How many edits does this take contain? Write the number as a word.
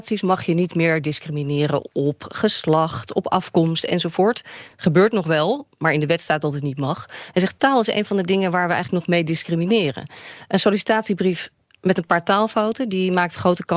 zero